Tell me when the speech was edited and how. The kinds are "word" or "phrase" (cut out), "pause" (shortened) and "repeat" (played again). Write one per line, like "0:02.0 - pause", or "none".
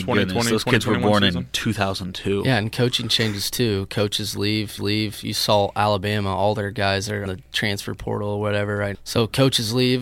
0:04.8 - repeat
0:07.3 - word
0:08.9 - word